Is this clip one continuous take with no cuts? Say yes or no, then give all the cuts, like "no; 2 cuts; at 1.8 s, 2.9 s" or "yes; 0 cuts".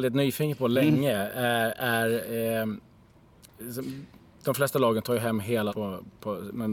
no; 1 cut; at 5.7 s